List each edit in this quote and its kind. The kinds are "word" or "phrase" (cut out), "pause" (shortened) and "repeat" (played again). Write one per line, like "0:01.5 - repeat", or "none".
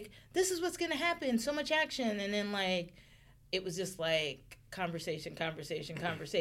0:04.6 - pause

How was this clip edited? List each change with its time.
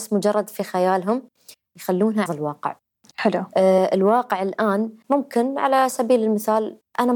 0:02.3 - phrase

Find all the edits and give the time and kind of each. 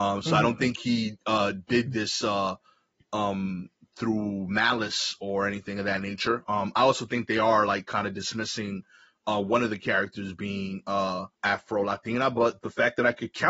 0:11.3 - pause

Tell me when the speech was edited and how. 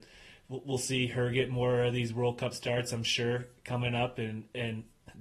none

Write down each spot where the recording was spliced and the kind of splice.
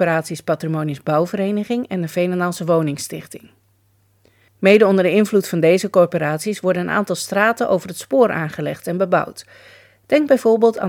none

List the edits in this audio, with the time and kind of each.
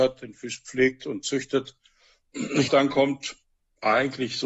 0:02.7 - word

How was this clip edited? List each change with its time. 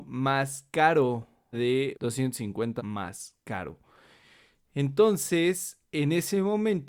0:01.5 - word
0:01.9 - word
0:02.8 - word

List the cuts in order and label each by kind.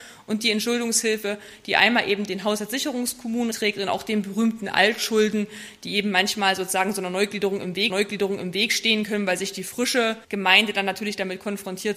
0:03.5 - word
0:07.9 - repeat
0:10.2 - pause

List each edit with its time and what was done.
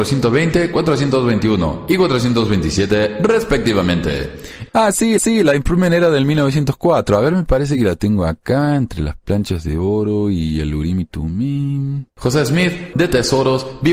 0:05.2 - repeat
0:12.1 - pause
0:12.9 - word

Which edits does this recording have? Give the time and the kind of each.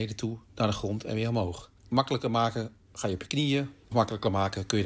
0:01.8 - pause
0:02.8 - pause
0:03.9 - phrase

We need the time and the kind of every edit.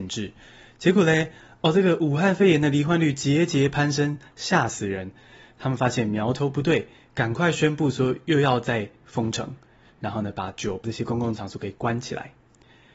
0:09.0 - pause
0:10.8 - word

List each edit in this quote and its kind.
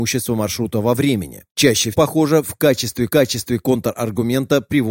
0:01.9 - word
0:03.1 - repeat

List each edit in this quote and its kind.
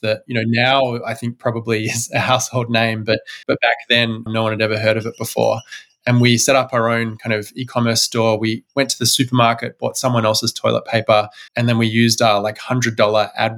0:03.4 - pause
0:04.3 - word
0:11.5 - pause

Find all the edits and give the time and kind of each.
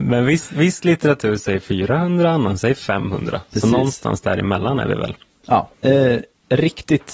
0:05.7 - pause

